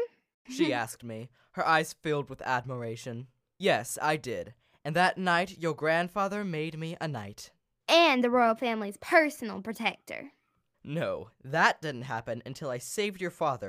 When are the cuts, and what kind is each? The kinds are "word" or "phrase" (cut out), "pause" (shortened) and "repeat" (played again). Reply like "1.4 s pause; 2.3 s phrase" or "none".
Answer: none